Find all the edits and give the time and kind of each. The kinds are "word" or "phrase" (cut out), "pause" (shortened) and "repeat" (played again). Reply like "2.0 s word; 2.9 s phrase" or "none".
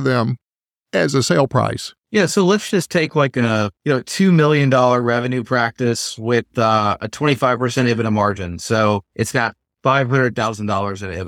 2.0 s pause; 3.8 s pause; 9.1 s pause